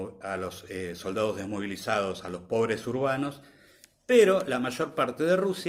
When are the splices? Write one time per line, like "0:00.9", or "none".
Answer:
none